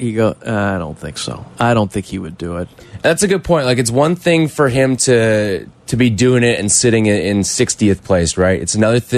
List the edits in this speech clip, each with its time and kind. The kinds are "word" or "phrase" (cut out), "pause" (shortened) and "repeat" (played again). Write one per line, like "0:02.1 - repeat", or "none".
none